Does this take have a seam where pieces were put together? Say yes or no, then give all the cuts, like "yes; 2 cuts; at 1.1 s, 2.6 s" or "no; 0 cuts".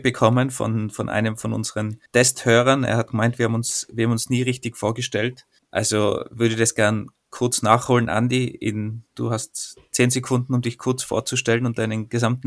yes; 3 cuts; at 2.1 s, 5.6 s, 9.1 s